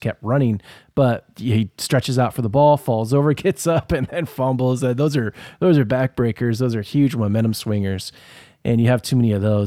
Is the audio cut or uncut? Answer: uncut